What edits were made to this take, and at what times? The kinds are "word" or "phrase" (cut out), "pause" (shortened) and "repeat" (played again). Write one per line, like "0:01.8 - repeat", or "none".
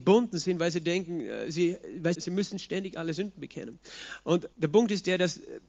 0:02.1 - word
0:04.5 - pause